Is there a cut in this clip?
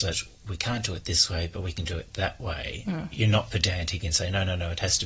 no; 0 cuts

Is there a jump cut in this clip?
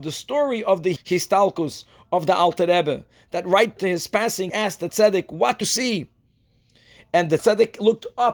yes; 6 cuts; at 1.0 s, 3.8 s, 4.5 s, 4.9 s, 5.6 s, 7.4 s

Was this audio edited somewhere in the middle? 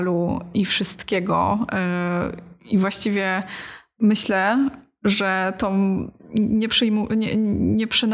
no; 0 cuts

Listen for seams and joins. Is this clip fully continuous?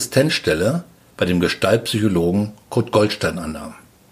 yes; 0 cuts

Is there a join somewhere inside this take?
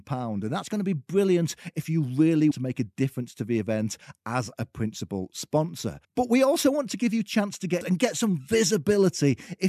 yes; 3 cuts; at 2.5 s, 6.0 s, 7.8 s

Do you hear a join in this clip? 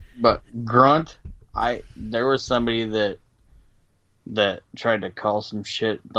yes; 1 cut; at 4.7 s

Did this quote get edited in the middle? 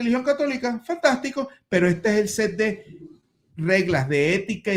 no; 0 cuts

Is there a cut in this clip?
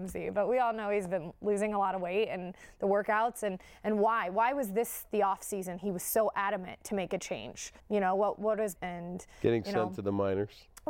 yes; 2 cuts; at 7.8 s, 8.8 s

